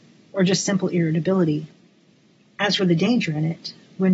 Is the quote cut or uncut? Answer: uncut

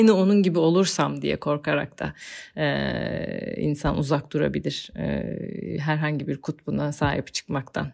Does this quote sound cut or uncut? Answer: uncut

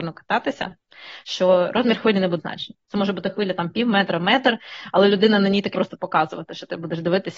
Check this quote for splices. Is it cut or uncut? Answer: cut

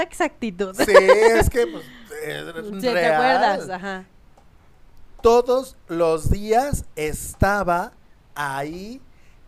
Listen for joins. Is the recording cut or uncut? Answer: uncut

